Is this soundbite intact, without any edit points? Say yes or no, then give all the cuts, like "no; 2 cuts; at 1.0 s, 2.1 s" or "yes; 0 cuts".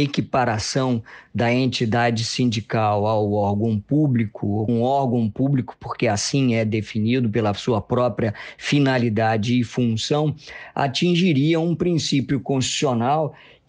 no; 1 cut; at 4.7 s